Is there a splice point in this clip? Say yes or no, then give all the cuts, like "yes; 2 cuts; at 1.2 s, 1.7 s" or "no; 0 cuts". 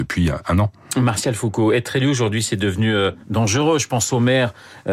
yes; 1 cut; at 3.2 s